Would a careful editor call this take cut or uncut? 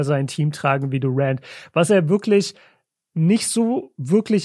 uncut